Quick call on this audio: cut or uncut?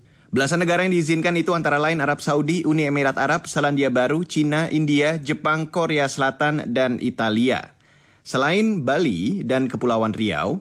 uncut